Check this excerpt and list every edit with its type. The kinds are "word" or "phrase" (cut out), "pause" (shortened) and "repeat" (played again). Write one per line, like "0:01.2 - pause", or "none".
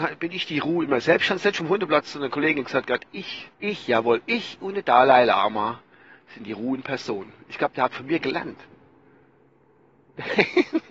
0:03.5 - pause